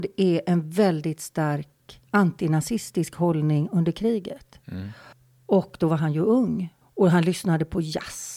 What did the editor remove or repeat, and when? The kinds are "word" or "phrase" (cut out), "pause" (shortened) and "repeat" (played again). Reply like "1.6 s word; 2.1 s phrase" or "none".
2.1 s pause; 5.1 s pause; 6.8 s pause